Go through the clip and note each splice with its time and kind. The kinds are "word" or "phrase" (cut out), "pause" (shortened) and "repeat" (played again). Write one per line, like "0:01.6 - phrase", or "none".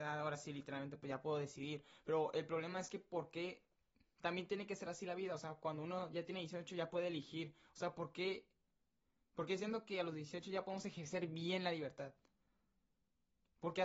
none